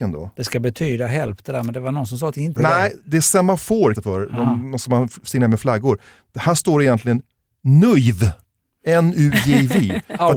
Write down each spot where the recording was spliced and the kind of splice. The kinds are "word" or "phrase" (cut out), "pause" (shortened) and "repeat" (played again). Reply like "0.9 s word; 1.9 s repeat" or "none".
2.6 s word; 3.9 s word